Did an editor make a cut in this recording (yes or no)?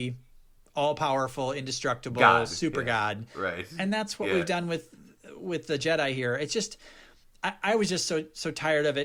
no